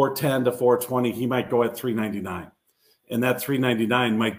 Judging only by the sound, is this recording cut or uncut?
uncut